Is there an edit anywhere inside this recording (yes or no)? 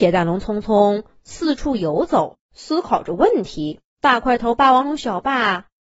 yes